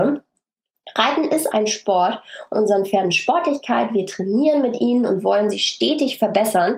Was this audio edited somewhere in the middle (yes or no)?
yes